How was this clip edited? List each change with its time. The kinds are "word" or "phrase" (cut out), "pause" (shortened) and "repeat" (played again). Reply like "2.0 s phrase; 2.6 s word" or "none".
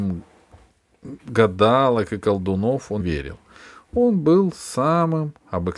3.0 s word